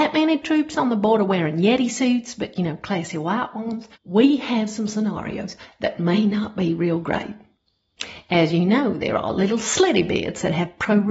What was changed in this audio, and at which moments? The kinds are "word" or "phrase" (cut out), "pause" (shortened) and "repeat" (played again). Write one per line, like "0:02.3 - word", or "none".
0:03.9 - pause